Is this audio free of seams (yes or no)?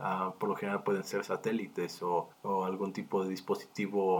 no